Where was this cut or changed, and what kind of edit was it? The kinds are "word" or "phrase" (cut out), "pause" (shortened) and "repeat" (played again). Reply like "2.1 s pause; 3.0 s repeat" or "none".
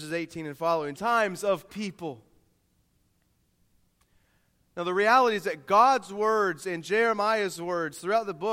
0.9 s phrase; 1.7 s word

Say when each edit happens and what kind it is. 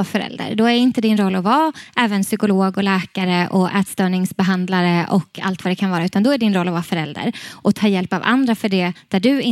none

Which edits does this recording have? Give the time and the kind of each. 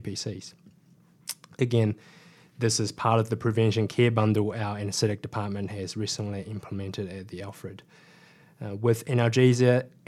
none

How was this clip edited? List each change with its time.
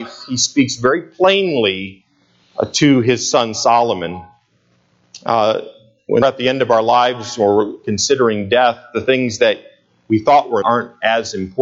6.2 s word; 10.6 s word

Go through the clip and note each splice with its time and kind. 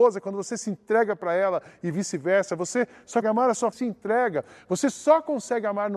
3.2 s word; 3.7 s phrase

